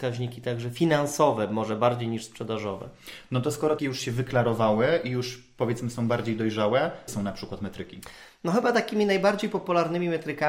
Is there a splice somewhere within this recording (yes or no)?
yes